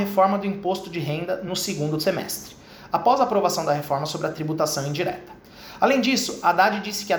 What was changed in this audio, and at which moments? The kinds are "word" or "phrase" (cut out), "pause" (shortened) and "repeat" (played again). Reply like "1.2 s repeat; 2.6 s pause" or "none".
none